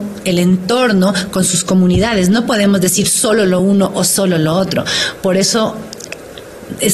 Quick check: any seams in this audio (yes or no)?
no